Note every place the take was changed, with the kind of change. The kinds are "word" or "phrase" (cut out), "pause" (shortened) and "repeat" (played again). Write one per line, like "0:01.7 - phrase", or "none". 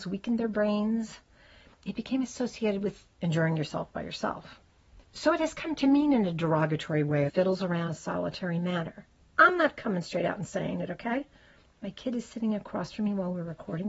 0:05.0 - pause
0:07.3 - phrase
0:07.9 - word
0:09.1 - pause